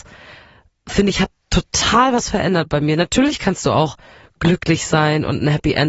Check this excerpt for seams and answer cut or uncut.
uncut